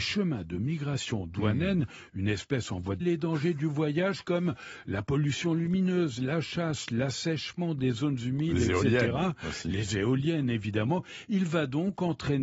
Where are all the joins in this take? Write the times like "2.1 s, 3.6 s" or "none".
3.0 s